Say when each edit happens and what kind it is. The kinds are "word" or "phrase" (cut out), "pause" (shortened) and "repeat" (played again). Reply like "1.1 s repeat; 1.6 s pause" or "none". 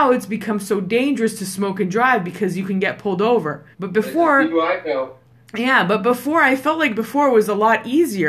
3.7 s pause; 5.3 s pause